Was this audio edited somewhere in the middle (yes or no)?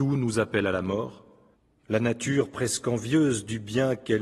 yes